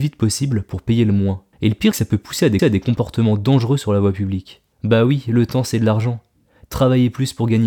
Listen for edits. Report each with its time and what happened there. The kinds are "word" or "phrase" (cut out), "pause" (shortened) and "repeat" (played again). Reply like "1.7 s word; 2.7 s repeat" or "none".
1.5 s pause; 1.9 s phrase; 2.6 s repeat; 4.7 s pause